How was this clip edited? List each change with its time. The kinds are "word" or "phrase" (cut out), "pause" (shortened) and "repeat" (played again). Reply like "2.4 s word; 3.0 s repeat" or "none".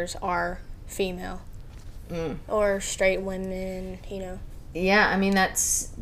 3.2 s word

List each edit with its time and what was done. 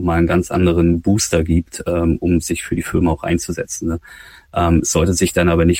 none

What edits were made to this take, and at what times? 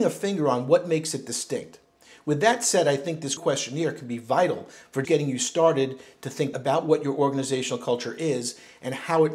3.4 s word; 5.0 s word; 6.5 s word

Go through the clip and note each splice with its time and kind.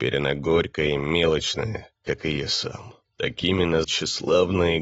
2.0 s pause; 3.1 s pause; 3.8 s word

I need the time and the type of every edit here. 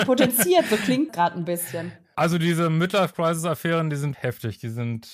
1.1 s word; 4.1 s word

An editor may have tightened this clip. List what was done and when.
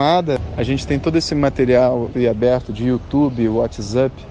2.1 s word

